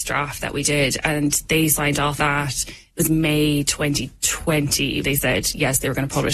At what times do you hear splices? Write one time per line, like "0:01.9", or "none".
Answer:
0:02.2
0:05.0